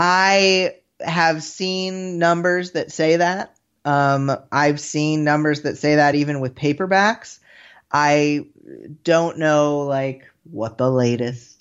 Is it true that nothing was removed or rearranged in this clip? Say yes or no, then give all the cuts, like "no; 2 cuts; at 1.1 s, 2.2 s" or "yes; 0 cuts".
yes; 0 cuts